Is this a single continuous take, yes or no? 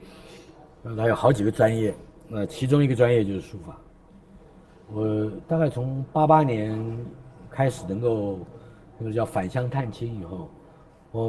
yes